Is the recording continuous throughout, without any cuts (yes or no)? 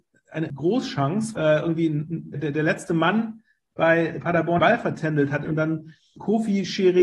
no